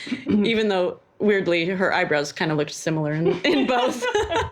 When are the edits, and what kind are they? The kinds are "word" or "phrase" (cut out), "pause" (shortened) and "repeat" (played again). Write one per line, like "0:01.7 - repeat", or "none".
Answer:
0:01.1 - pause